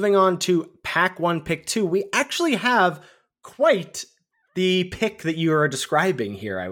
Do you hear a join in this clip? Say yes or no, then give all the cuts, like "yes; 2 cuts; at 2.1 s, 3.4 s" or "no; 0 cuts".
no; 0 cuts